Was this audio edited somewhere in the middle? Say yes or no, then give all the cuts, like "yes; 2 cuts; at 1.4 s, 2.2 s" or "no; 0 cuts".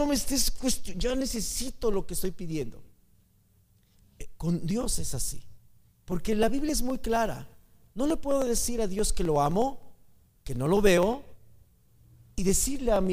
no; 0 cuts